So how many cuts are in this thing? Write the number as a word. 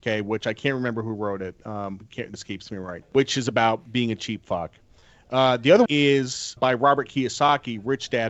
four